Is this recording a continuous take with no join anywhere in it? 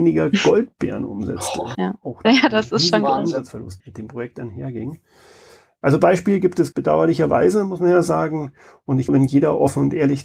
no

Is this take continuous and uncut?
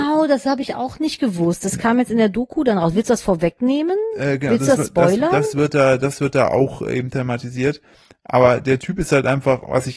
yes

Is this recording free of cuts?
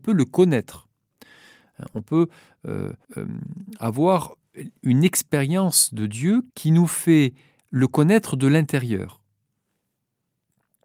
no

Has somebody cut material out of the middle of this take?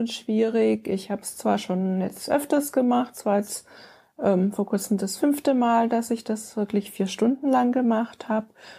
no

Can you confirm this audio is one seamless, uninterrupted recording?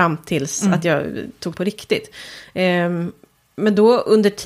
no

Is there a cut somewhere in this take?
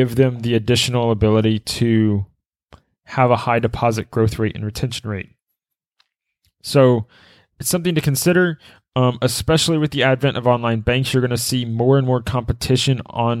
no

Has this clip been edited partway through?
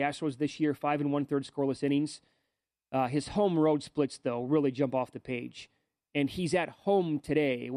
no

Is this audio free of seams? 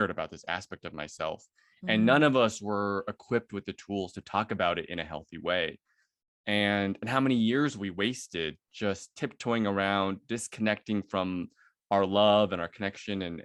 yes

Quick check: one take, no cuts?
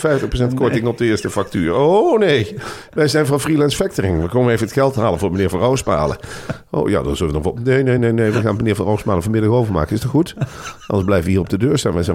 yes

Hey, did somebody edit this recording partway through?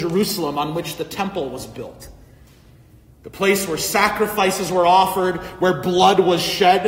no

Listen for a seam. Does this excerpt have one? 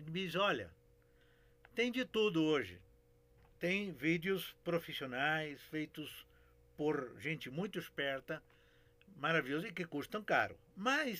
no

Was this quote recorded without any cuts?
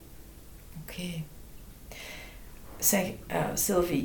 yes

